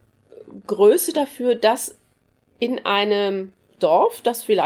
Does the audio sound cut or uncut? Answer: uncut